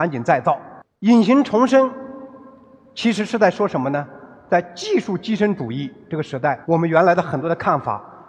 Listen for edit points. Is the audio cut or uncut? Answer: cut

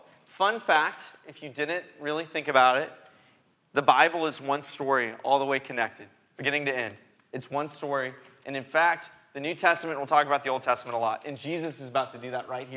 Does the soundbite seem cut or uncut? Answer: uncut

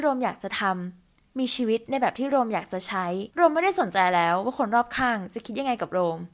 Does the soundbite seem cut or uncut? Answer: cut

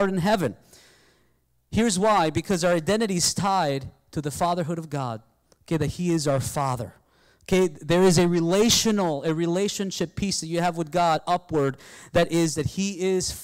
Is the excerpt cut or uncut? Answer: uncut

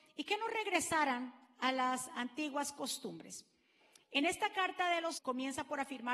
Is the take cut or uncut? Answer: cut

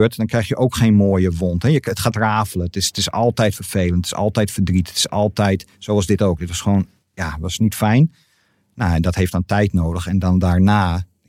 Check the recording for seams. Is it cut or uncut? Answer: uncut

